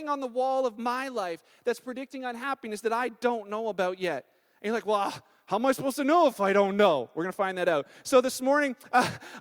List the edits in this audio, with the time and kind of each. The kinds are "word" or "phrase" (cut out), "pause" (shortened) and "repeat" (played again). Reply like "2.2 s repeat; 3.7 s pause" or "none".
none